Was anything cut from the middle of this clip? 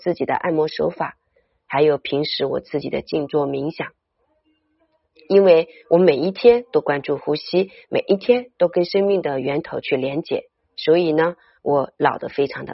yes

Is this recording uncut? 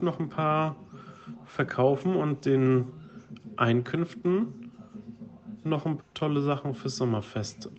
no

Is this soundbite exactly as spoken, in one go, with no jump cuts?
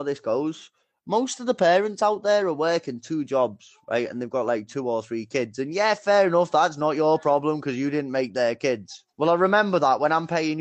no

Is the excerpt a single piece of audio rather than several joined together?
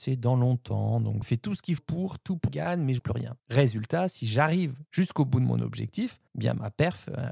no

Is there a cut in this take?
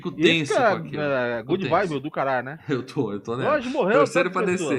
no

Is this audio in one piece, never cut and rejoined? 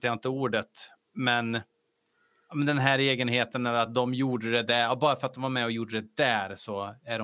yes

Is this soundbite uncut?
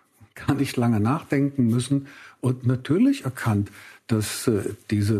yes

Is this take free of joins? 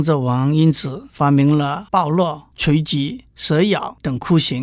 no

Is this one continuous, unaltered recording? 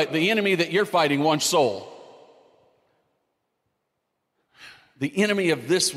no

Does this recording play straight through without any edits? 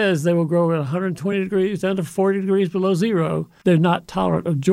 yes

